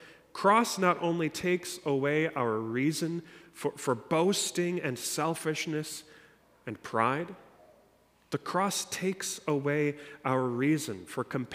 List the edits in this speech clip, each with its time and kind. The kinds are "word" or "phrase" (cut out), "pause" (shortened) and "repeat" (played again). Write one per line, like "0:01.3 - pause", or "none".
none